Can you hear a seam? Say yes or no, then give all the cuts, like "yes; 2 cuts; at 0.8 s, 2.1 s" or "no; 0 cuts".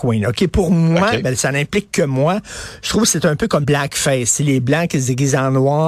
yes; 1 cut; at 3.6 s